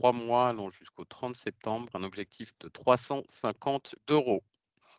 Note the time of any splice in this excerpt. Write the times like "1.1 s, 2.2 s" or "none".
1.9 s, 2.5 s, 4.0 s